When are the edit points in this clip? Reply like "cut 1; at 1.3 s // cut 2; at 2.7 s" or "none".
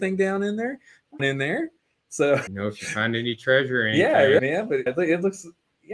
cut 1; at 1.2 s // cut 2; at 2.5 s // cut 3; at 4.4 s // cut 4; at 4.9 s